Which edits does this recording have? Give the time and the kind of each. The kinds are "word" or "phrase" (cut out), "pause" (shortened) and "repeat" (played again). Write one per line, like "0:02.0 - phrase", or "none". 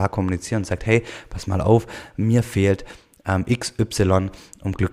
none